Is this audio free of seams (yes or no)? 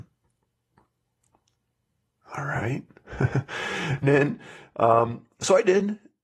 no